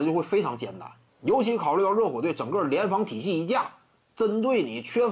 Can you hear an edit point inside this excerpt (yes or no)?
yes